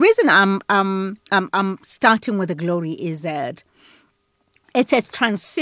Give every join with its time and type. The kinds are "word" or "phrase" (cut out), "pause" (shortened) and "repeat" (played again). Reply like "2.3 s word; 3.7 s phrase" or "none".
1.2 s pause